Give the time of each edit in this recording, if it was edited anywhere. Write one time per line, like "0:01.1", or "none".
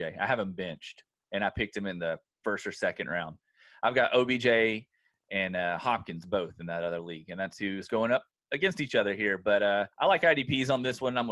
0:09.9